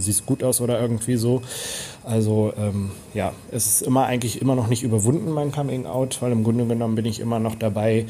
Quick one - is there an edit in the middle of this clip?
no; 0 cuts

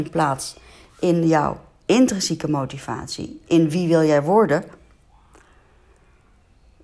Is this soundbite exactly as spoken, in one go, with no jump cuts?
yes; 0 cuts

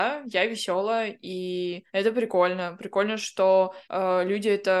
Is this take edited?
yes; 2 cuts; at 1.9 s, 3.8 s

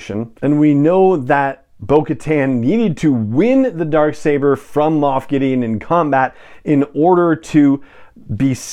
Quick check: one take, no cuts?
yes; 0 cuts

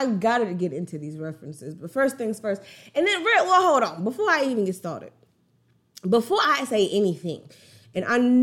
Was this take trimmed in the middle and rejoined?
no; 0 cuts

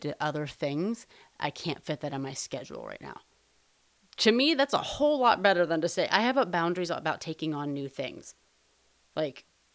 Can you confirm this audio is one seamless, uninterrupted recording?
yes; 0 cuts

